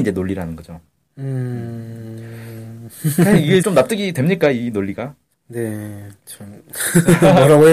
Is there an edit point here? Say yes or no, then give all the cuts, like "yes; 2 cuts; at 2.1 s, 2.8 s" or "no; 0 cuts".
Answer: yes; 2 cuts; at 3.6 s, 5.3 s